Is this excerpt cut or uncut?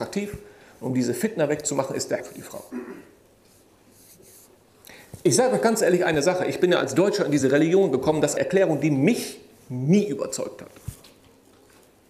cut